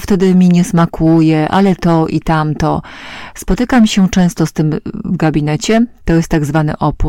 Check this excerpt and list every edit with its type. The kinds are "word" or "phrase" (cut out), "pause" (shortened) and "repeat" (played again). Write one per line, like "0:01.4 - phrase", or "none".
none